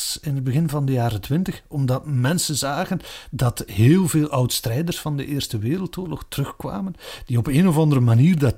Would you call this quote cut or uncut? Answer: uncut